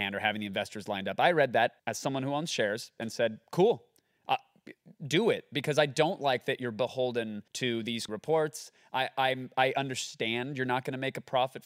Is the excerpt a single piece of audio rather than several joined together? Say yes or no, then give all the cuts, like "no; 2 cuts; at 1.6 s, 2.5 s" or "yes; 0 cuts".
no; 3 cuts; at 1.8 s, 7.5 s, 8.1 s